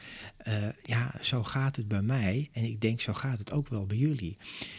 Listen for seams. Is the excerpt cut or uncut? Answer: uncut